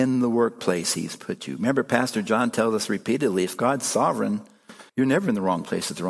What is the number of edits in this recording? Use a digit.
1